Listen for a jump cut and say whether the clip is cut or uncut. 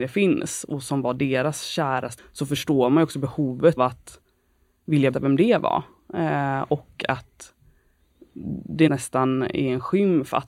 cut